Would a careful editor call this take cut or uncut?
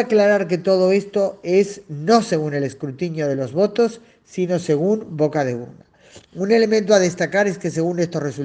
cut